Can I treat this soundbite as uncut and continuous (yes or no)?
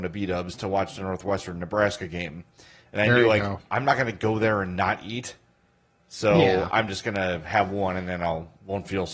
yes